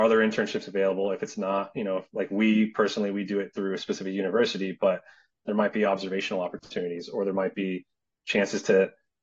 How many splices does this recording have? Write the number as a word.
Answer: zero